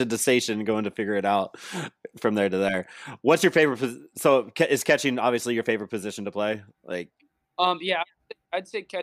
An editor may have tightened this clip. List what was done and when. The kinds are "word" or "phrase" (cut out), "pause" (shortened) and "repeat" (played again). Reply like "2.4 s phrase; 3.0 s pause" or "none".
none